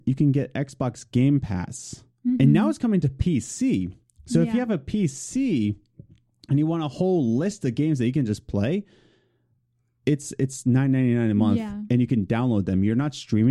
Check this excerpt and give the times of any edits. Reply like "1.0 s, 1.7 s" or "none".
none